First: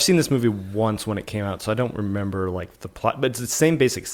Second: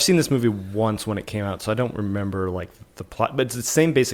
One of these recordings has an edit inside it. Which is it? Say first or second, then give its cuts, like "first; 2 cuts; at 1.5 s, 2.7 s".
first; 1 cut; at 2.8 s